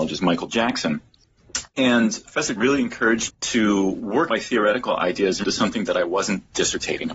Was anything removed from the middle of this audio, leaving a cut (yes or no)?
yes